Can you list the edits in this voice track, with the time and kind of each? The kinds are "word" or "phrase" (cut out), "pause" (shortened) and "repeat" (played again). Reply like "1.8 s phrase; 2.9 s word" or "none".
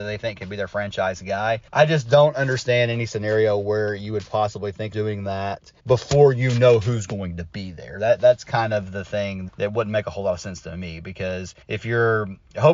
1.7 s pause; 4.9 s word; 5.8 s pause; 9.5 s word; 11.6 s pause